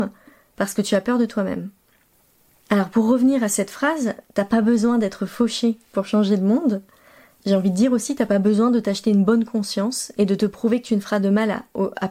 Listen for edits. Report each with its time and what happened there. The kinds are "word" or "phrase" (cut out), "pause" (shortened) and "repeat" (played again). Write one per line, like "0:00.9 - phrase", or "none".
none